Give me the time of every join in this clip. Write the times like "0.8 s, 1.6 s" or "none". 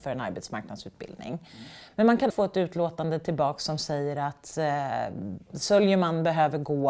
2.3 s